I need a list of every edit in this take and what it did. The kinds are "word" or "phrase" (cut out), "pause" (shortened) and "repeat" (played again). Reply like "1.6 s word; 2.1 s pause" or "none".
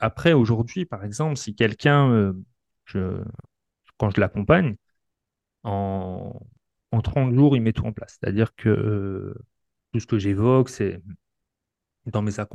none